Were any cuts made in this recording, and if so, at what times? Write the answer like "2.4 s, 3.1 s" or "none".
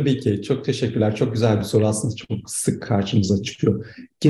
none